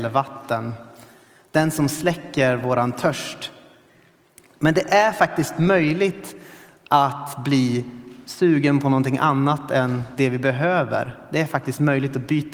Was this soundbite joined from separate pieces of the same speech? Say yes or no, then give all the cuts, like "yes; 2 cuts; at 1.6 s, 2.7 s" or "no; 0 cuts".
no; 0 cuts